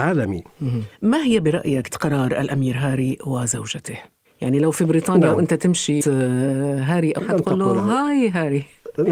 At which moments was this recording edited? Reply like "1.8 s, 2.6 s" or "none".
1.9 s, 6.0 s, 7.2 s